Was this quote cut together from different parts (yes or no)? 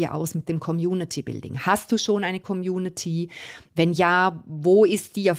no